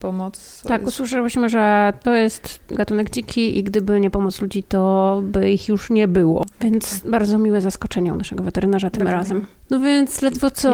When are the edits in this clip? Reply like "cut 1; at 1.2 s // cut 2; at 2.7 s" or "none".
none

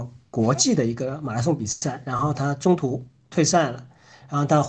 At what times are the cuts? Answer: none

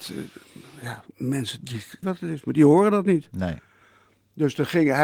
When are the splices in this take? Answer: cut 1; at 2.0 s

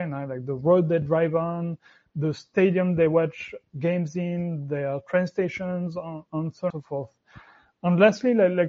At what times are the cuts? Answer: cut 1; at 6.7 s

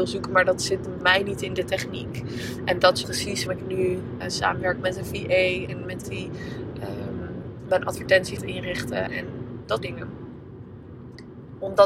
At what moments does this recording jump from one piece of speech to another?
cut 1; at 1.0 s // cut 2; at 3.0 s // cut 3; at 3.5 s // cut 4; at 4.2 s // cut 5; at 5.7 s // cut 6; at 6.0 s // cut 7; at 8.4 s // cut 8; at 9.1 s // cut 9; at 9.8 s

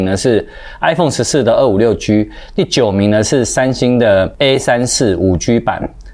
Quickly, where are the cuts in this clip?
none

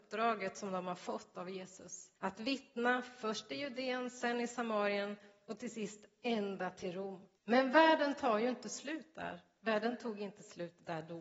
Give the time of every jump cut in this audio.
cut 1; at 2.2 s // cut 2; at 7.4 s

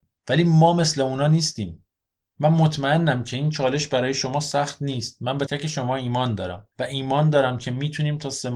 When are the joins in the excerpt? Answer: cut 1; at 5.5 s // cut 2; at 6.7 s

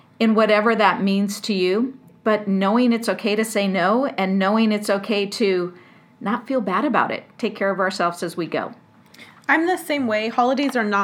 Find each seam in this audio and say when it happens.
cut 1; at 7.3 s

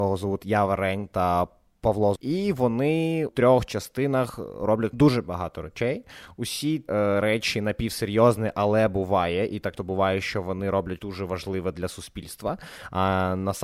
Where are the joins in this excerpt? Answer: cut 1; at 2.2 s // cut 2; at 3.3 s // cut 3; at 4.9 s // cut 4; at 6.9 s // cut 5; at 9.8 s // cut 6; at 11.0 s

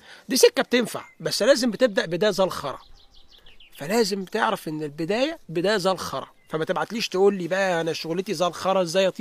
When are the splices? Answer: none

